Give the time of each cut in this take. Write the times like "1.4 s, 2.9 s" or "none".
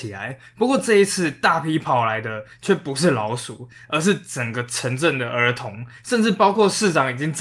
6.0 s